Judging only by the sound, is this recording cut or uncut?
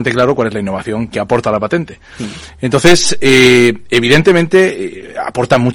cut